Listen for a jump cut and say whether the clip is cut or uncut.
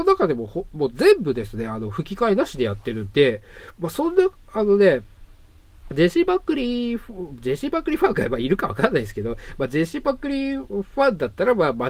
uncut